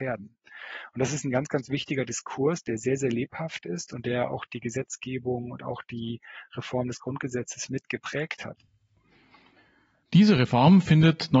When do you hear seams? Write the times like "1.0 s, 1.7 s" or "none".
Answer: none